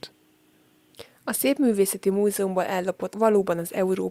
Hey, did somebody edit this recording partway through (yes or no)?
yes